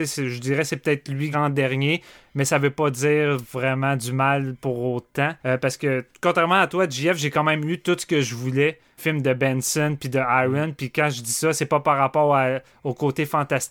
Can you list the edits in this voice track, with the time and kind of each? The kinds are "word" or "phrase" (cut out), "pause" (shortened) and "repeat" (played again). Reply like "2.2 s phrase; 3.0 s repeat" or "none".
1.3 s phrase; 5.4 s pause; 9.0 s word